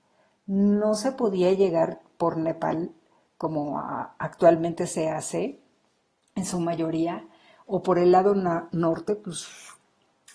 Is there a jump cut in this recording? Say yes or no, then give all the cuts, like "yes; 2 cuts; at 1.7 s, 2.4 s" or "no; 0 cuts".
no; 0 cuts